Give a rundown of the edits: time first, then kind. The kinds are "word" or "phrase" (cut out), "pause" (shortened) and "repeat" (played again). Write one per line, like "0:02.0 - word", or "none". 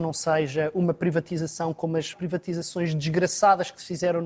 0:02.1 - word